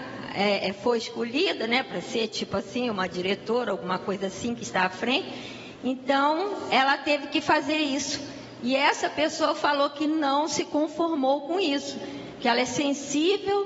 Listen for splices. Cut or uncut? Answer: uncut